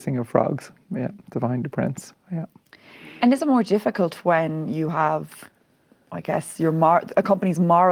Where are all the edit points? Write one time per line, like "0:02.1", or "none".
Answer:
none